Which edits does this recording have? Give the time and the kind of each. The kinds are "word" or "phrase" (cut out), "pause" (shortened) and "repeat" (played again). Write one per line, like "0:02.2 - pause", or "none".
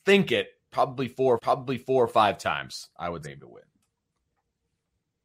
0:01.4 - repeat
0:03.2 - phrase